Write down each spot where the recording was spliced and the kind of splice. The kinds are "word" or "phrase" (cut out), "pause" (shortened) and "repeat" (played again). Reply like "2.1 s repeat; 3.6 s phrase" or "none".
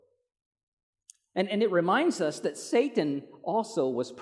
none